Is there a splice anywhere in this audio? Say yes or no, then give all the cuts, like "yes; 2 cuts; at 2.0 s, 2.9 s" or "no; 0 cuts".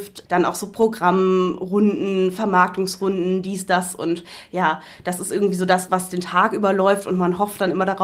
no; 0 cuts